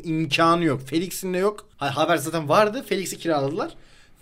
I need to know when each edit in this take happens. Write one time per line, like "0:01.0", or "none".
0:01.7